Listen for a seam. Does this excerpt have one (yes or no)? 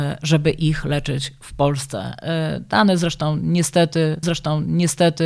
yes